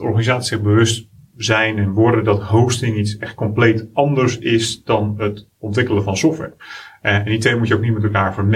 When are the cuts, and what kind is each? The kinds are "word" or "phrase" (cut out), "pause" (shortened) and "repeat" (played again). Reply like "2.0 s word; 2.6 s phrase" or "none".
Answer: none